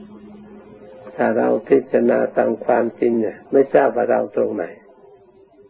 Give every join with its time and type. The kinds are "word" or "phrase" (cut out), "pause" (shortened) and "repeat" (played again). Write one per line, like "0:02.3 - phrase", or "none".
0:03.5 - pause